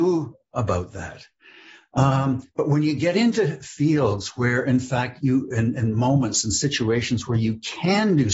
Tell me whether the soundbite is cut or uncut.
uncut